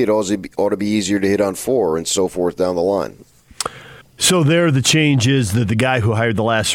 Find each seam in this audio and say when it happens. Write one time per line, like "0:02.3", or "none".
0:04.0